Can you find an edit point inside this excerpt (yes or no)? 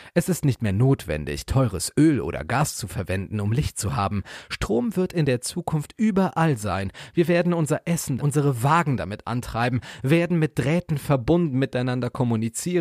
yes